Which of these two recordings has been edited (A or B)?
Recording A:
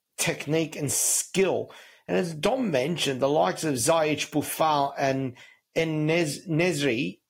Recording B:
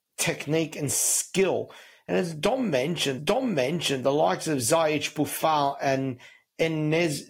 B